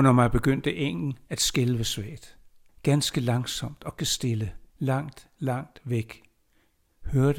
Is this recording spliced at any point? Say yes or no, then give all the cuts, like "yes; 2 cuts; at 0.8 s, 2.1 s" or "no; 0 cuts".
yes; 3 cuts; at 2.7 s, 4.0 s, 4.7 s